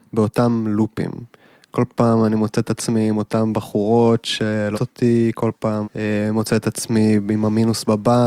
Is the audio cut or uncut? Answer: cut